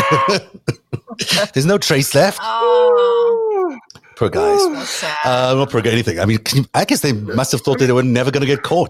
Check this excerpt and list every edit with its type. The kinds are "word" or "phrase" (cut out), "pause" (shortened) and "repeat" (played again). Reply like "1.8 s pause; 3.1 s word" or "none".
none